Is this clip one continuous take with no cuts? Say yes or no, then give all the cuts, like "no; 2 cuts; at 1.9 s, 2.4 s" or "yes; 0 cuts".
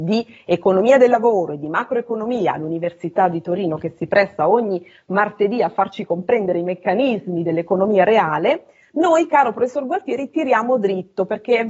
yes; 0 cuts